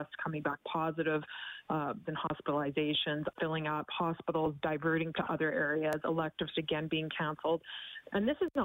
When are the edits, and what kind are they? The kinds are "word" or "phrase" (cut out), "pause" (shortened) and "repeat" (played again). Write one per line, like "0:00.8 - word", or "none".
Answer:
0:02.0 - phrase
0:03.4 - word
0:05.1 - word
0:06.5 - word